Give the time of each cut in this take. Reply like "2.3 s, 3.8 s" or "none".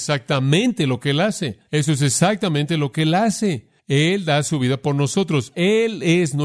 1.6 s

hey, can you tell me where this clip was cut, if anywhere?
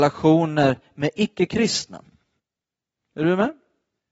2.4 s

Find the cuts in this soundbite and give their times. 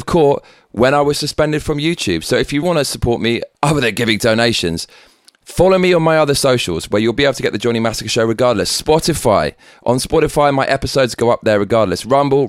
2.6 s, 3.5 s

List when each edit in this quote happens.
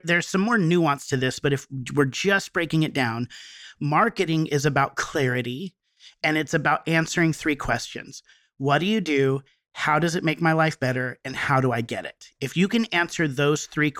none

